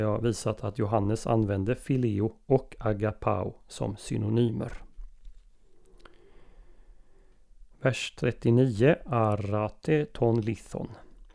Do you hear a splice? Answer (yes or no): no